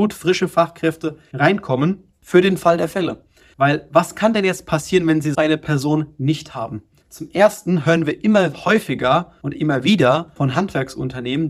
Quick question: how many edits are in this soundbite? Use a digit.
1